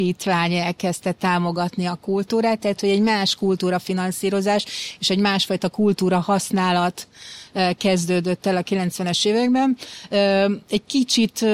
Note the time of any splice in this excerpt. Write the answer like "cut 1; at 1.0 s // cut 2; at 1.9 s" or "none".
none